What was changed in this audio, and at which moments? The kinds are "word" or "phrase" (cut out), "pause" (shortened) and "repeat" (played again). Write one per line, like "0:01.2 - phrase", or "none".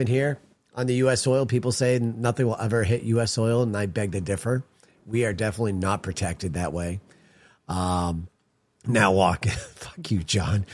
none